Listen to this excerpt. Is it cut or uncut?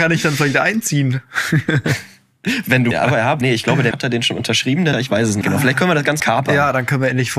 cut